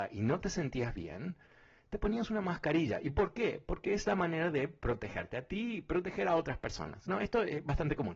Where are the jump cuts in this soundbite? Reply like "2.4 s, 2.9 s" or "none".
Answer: none